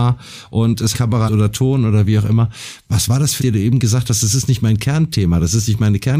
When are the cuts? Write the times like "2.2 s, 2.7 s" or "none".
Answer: 0.9 s, 1.3 s, 3.4 s